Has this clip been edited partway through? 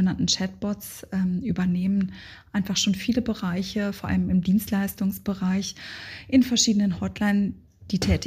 no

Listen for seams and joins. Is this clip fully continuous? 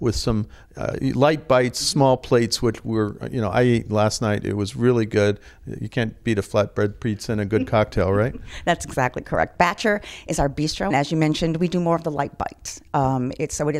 no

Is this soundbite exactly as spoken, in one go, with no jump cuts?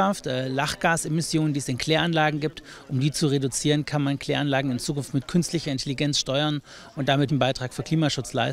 no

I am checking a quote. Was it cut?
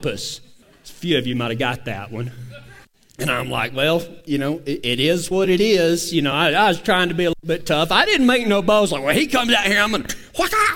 no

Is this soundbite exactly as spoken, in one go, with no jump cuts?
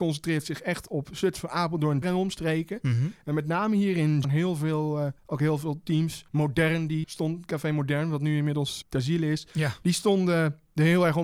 no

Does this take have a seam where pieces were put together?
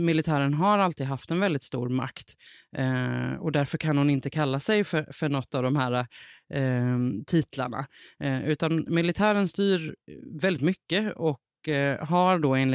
no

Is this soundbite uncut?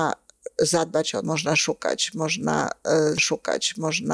no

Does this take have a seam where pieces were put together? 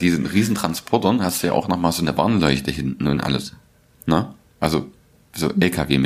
no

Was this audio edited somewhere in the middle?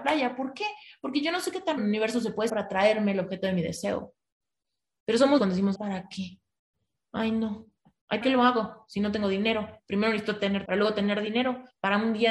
yes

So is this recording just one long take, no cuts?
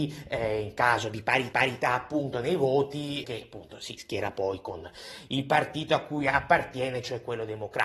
no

